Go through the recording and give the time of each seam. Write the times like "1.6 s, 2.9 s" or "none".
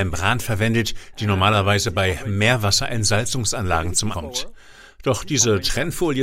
4.1 s